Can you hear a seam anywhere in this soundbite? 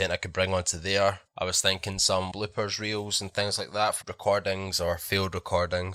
yes; 3 cuts; at 1.3 s, 2.3 s, 4.0 s

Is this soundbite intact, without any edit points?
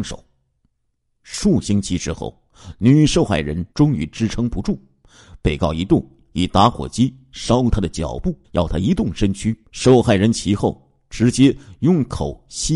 no; 3 cuts; at 3.7 s, 8.4 s, 9.6 s

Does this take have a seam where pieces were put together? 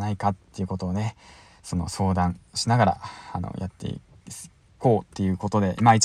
no; 0 cuts

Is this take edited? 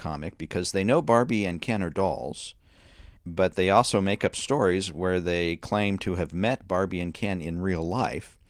yes; 1 cut; at 3.2 s

